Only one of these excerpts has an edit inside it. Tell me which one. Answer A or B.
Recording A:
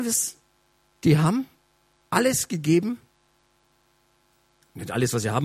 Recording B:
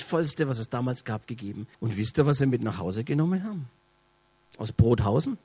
B